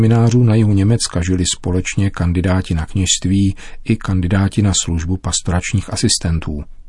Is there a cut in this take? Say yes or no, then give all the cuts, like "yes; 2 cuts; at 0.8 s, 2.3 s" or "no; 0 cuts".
no; 0 cuts